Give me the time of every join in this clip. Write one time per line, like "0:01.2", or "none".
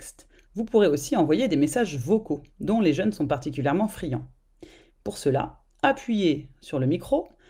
none